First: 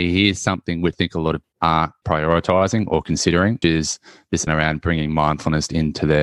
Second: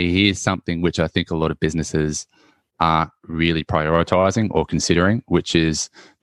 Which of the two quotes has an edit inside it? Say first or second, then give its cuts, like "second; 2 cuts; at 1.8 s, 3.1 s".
first; 5 cuts; at 0.9 s, 1.4 s, 2.0 s, 3.6 s, 4.5 s